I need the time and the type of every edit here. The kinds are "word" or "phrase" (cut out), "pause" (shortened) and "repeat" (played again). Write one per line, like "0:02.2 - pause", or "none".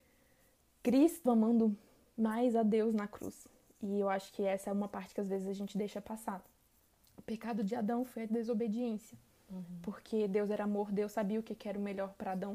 0:01.3 - word